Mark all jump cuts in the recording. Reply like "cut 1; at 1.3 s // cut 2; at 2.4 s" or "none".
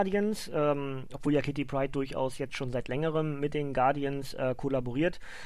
none

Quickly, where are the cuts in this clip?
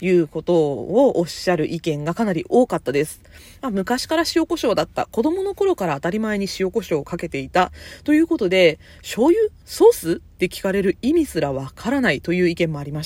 none

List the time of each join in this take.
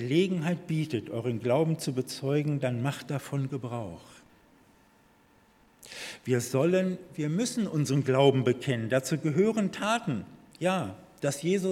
none

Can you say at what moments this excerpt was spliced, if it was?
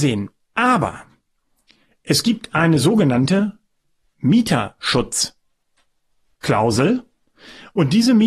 none

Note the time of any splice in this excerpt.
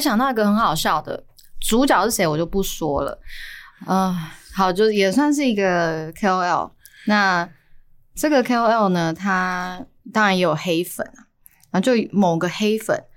none

